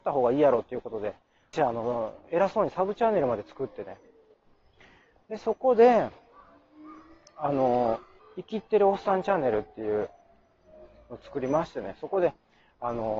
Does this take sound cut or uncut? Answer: cut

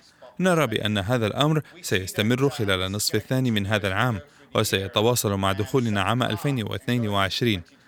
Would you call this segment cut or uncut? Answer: uncut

